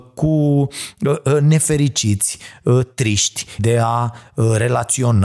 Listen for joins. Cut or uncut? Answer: cut